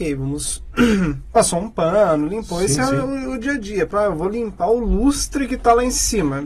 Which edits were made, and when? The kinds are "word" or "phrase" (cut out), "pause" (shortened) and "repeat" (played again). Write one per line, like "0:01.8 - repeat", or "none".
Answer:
0:03.9 - word